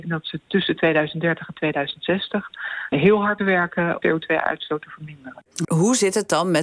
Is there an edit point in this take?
yes; 4 cuts; at 2.9 s, 3.4 s, 4.0 s, 5.6 s

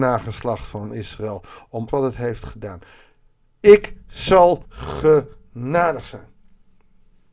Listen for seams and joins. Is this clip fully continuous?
no; 2 cuts; at 1.9 s, 4.6 s

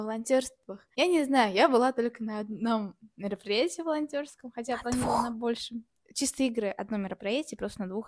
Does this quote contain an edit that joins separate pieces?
yes; 2 cuts; at 0.9 s, 6.0 s

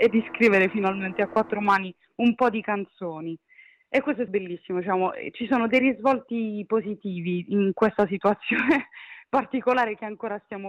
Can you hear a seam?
yes; 1 cut; at 4.3 s

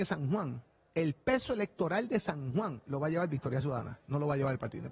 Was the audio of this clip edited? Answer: no; 0 cuts

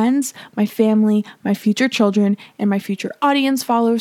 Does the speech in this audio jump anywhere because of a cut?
no; 0 cuts

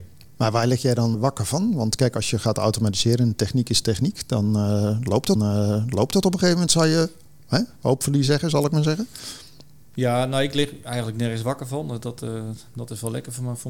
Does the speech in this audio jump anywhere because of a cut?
yes; 2 cuts; at 1.1 s, 5.4 s

